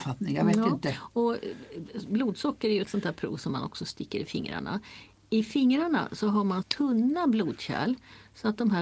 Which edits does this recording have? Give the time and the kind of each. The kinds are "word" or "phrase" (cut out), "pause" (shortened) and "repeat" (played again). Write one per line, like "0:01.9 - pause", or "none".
0:02.9 - word
0:06.6 - word